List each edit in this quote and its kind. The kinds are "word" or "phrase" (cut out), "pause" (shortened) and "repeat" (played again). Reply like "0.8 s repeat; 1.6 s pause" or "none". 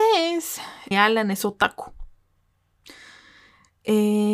0.9 s phrase